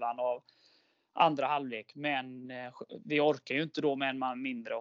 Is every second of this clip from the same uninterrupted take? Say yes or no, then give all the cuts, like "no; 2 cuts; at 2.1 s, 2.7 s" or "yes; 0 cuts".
yes; 0 cuts